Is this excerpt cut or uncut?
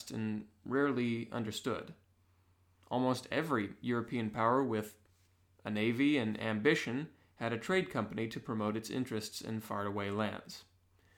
uncut